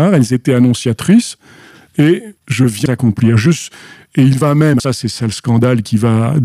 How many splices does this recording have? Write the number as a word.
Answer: three